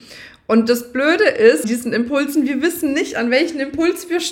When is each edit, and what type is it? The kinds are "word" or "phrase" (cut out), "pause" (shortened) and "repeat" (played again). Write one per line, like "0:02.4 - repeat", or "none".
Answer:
0:01.6 - word

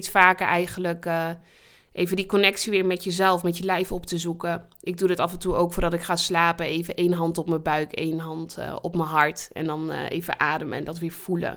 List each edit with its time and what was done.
none

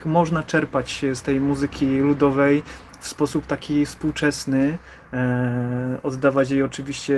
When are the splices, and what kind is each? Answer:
none

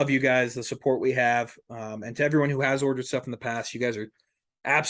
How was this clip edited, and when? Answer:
none

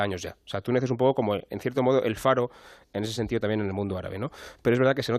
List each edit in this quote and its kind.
none

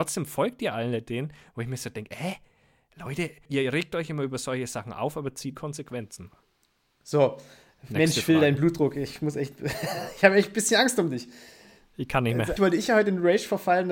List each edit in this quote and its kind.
0:03.5 - word
0:05.5 - word
0:12.6 - word

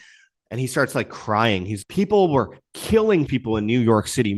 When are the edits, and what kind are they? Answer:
0:01.8 - word
0:03.3 - word

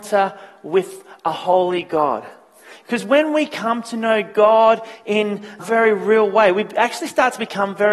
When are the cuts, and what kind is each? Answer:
0:05.6 - word

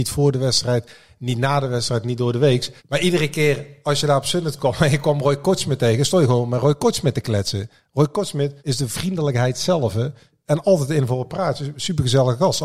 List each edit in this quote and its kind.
0:02.8 - pause
0:08.6 - pause

